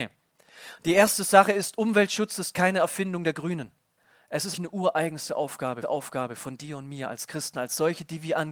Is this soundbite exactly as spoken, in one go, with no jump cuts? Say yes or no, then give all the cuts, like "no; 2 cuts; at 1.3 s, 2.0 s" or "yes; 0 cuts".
no; 3 cuts; at 4.0 s, 4.5 s, 5.8 s